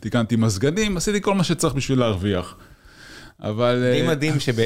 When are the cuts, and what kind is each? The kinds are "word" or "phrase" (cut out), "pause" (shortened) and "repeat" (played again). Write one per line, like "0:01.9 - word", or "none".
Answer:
none